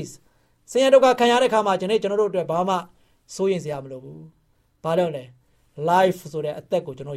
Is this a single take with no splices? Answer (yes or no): yes